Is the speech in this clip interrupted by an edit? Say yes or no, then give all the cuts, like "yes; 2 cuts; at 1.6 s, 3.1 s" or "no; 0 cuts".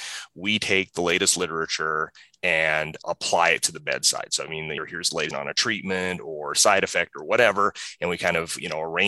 yes; 2 cuts; at 4.8 s, 5.3 s